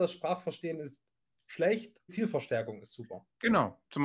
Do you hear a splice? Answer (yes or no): yes